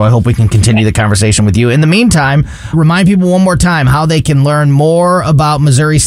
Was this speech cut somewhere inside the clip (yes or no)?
yes